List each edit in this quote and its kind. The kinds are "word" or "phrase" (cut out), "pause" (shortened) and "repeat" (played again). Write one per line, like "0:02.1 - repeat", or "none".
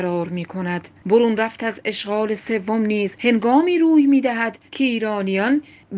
0:04.7 - pause